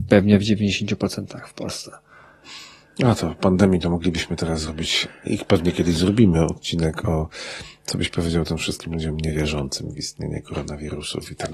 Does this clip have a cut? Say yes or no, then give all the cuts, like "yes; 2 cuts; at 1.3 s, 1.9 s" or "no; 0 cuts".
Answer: no; 0 cuts